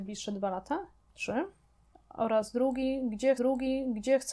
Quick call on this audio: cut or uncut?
cut